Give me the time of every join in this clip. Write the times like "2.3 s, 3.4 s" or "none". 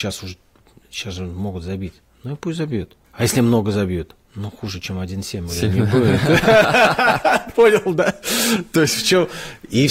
3.0 s